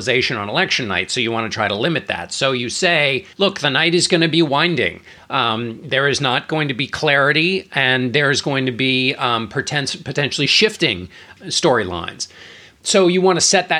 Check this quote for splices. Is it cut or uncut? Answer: cut